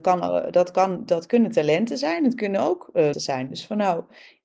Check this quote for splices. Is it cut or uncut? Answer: cut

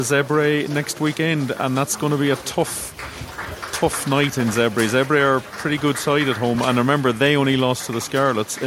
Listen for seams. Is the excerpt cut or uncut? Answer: uncut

